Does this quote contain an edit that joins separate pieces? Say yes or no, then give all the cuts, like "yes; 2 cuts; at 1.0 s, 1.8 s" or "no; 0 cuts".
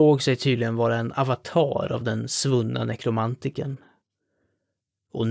no; 0 cuts